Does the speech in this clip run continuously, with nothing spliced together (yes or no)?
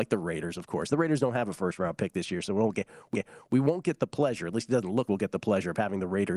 no